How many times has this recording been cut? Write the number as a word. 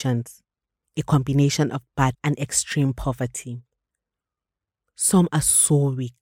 one